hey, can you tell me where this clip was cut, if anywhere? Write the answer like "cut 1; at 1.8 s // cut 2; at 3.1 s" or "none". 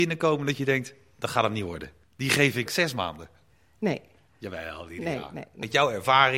cut 1; at 2.7 s